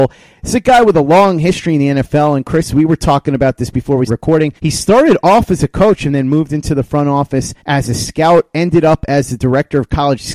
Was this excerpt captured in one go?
no; 3 cuts; at 4.1 s, 4.6 s, 7.6 s

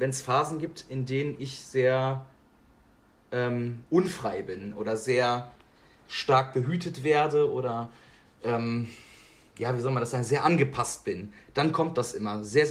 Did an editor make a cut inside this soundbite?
no; 0 cuts

